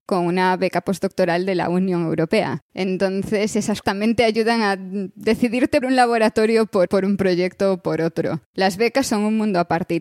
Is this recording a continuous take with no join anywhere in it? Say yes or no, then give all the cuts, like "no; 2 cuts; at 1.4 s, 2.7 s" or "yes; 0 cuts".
no; 3 cuts; at 3.8 s, 5.8 s, 6.9 s